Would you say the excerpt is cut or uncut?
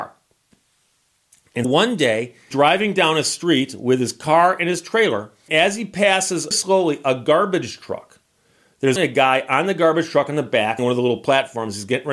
cut